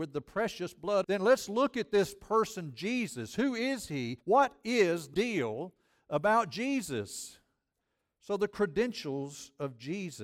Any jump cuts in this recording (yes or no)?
yes